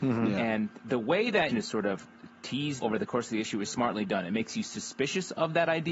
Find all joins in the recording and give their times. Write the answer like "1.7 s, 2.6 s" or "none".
1.5 s, 2.8 s, 3.7 s